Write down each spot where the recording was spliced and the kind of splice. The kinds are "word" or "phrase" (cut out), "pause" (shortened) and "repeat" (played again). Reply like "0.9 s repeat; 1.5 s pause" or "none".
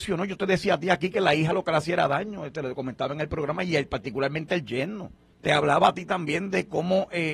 5.3 s pause